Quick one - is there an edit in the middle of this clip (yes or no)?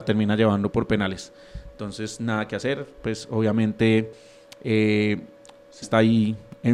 yes